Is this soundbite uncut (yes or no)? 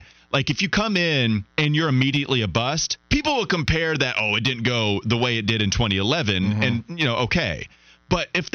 no